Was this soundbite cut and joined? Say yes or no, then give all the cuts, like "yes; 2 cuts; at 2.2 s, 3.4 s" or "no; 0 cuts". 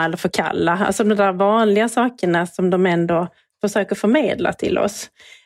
no; 0 cuts